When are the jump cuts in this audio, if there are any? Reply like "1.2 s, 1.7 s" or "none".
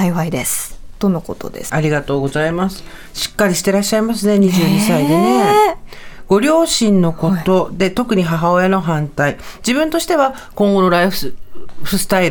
1.7 s